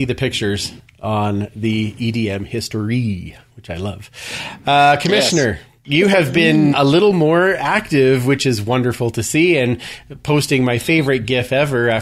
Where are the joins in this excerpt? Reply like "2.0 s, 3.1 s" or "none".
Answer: 6.7 s